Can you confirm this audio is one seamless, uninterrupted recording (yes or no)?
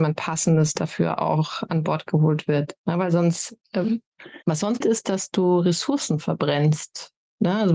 no